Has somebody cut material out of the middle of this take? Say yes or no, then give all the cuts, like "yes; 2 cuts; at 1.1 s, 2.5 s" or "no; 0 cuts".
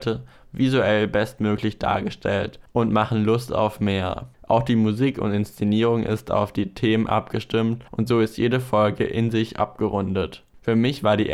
yes; 2 cuts; at 4.3 s, 7.9 s